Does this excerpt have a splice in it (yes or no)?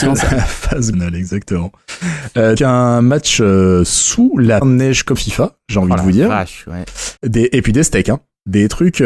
yes